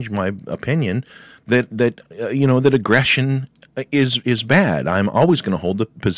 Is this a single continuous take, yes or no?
yes